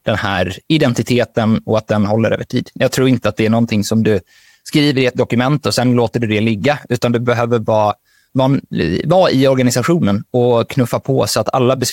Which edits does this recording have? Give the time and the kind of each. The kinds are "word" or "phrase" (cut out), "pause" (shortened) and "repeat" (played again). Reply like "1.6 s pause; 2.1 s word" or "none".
none